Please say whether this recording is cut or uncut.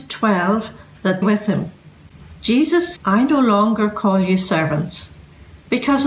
cut